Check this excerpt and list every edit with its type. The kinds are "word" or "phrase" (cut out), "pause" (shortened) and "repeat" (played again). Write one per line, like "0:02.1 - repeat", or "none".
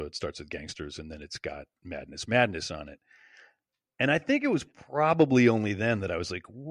none